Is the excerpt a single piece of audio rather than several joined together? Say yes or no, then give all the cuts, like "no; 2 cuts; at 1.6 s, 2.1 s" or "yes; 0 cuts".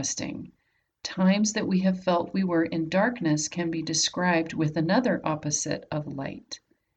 yes; 0 cuts